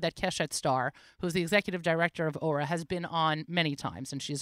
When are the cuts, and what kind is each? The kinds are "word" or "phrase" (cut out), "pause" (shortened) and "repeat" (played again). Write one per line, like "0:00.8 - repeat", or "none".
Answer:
none